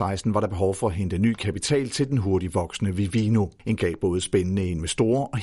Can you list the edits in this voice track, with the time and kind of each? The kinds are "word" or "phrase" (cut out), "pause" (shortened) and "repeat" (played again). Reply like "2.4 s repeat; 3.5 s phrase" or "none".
3.8 s word

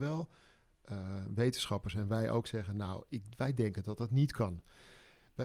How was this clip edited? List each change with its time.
none

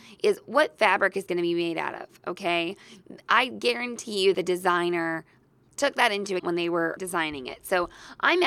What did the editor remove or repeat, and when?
1.3 s word; 4.3 s word; 5.7 s word; 6.4 s word; 7.0 s word

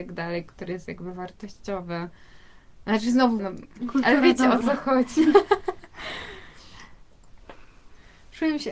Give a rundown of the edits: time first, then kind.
3.4 s word

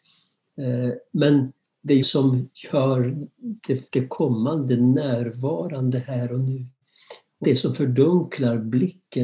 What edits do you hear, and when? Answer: 1.6 s pause; 2.0 s word; 2.5 s pause; 3.9 s phrase; 7.4 s word

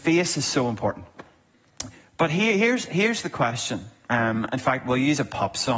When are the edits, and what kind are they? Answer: none

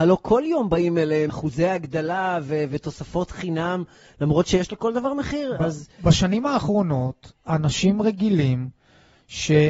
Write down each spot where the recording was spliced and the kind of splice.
1.3 s word

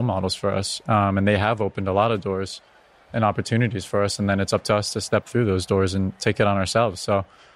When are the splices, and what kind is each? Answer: none

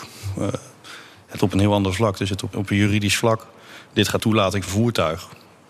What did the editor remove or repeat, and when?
1.4 s word; 2.5 s word; 4.2 s word; 4.7 s word

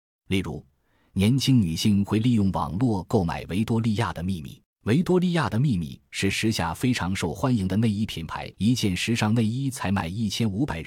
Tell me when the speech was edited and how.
4.7 s pause; 8.5 s pause

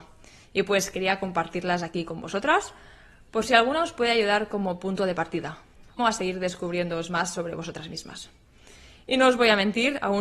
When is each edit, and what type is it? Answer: 6.0 s phrase

